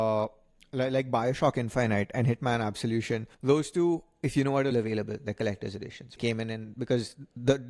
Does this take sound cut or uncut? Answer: cut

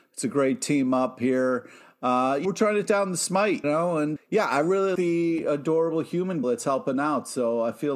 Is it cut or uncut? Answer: cut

